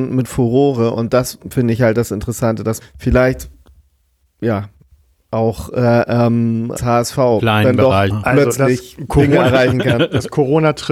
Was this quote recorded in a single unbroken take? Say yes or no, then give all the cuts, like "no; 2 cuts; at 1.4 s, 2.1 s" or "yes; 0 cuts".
no; 3 cuts; at 2.8 s, 6.8 s, 8.1 s